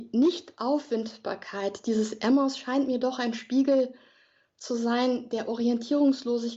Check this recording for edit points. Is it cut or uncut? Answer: uncut